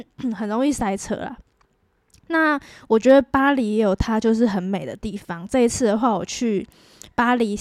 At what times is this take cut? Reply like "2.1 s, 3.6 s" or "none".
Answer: none